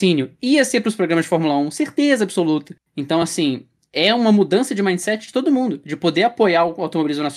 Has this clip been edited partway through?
no; 0 cuts

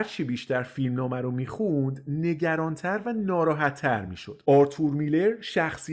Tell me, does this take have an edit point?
no; 0 cuts

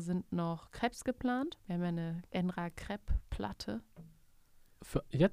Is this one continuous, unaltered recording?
no; 2 cuts; at 1.6 s, 2.3 s

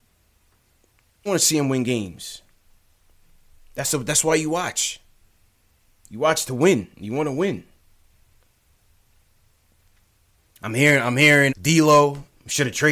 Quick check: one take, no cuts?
no; 2 cuts; at 1.3 s, 11.5 s

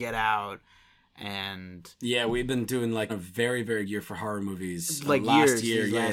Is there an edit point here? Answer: yes; 2 cuts; at 3.1 s, 3.8 s

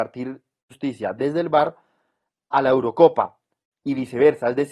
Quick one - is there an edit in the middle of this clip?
no; 0 cuts

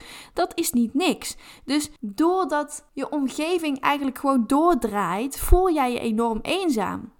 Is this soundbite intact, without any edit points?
no; 1 cut; at 2.0 s

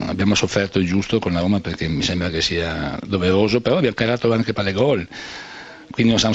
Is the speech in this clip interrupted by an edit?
yes; 1 cut; at 4.6 s

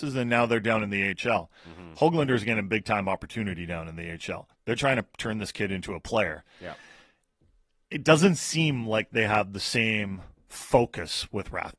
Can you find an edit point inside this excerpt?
no; 0 cuts

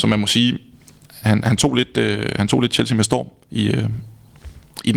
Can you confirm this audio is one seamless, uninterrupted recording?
no; 1 cut; at 1.2 s

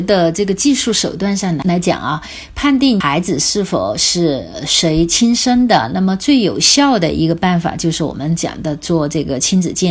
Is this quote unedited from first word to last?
yes; 0 cuts

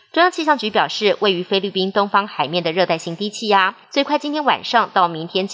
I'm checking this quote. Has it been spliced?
yes; 1 cut; at 3.8 s

